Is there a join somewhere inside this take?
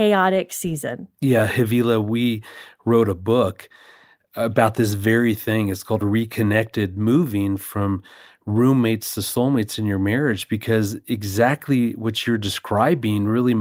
no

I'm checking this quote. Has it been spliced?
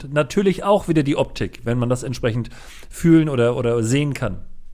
no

